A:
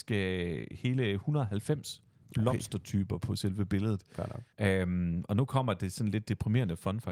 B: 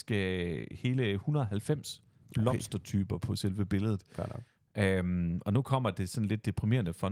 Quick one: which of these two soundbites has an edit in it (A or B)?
A